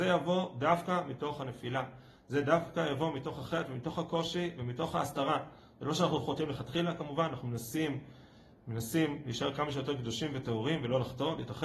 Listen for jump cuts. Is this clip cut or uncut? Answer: uncut